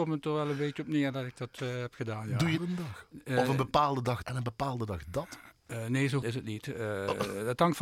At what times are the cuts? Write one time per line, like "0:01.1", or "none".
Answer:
0:02.6
0:04.2
0:05.6
0:06.2